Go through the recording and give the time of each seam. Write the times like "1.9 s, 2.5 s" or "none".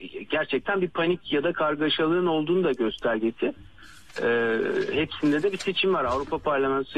none